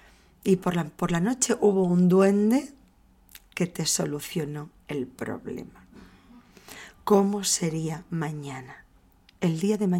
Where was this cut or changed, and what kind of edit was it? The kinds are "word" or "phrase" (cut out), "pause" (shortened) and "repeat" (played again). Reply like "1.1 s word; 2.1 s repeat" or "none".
none